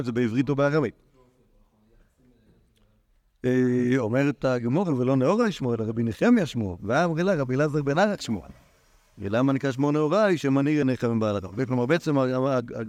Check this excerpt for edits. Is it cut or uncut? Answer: uncut